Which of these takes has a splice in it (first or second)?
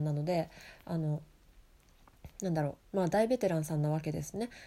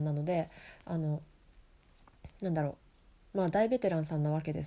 first